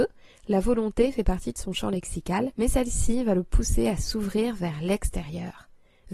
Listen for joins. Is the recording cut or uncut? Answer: cut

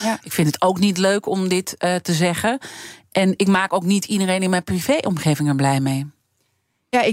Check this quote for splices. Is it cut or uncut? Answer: uncut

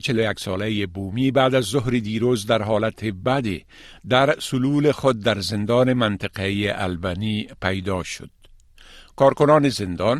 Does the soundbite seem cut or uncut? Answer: uncut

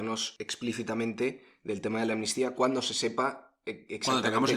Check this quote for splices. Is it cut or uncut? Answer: uncut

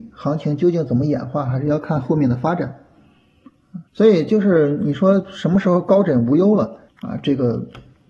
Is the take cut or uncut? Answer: cut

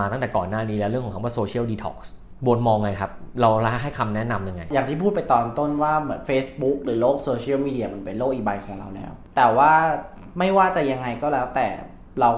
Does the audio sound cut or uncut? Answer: uncut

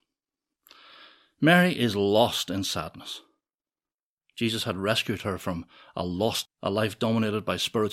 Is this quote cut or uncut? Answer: cut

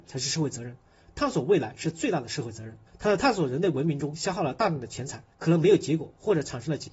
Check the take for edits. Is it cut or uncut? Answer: cut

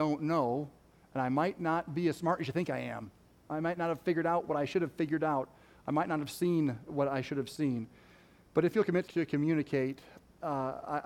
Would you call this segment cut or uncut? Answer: cut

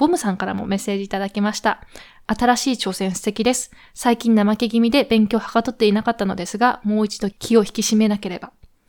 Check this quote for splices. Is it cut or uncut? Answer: uncut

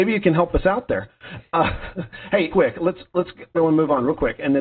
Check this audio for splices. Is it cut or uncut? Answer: cut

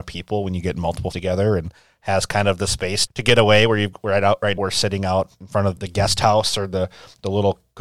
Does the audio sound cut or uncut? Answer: cut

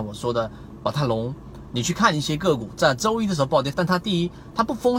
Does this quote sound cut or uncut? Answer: cut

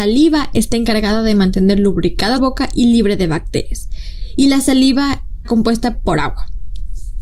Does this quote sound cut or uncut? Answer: cut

